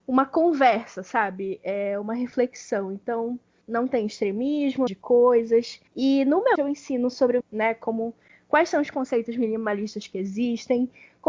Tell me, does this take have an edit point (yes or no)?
yes